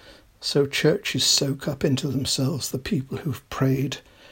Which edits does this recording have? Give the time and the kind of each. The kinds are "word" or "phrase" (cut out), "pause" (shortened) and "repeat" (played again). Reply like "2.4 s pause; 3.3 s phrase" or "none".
2.7 s phrase

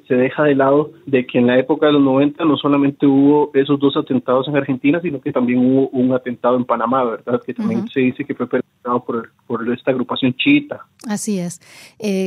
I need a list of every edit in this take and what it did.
1.0 s pause

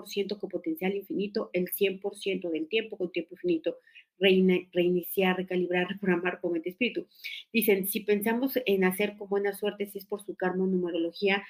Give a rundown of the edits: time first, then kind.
6.4 s word

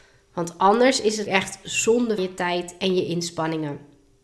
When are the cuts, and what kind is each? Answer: 1.3 s word; 2.2 s word

